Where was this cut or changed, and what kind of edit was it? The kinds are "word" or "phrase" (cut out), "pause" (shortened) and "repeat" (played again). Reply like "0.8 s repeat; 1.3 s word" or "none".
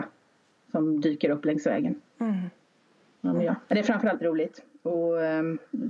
2.1 s pause; 3.6 s pause; 4.2 s phrase